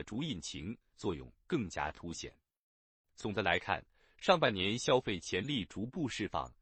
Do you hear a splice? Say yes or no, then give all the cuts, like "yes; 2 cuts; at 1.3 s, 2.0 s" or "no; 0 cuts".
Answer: no; 0 cuts